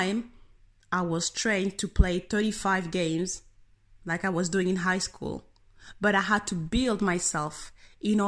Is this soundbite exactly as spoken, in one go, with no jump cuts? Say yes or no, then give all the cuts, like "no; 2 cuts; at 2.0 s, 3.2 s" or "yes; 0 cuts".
yes; 0 cuts